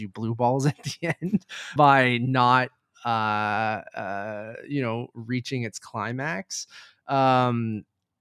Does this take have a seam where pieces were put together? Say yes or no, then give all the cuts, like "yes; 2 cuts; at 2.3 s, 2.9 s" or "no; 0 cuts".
yes; 1 cut; at 1.8 s